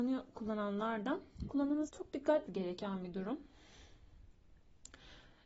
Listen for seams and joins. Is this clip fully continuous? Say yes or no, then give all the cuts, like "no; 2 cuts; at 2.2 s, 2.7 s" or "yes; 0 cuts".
no; 2 cuts; at 1.9 s, 2.5 s